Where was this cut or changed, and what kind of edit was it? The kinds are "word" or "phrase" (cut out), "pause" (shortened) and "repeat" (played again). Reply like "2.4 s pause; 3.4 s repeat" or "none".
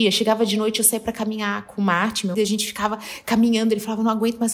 2.3 s word